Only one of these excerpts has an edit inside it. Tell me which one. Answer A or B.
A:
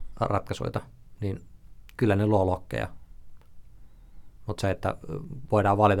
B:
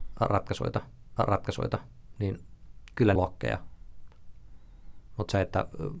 B